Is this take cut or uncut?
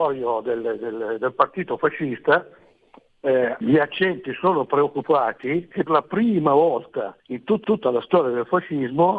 cut